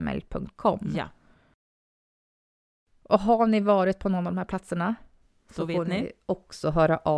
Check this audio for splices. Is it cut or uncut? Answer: uncut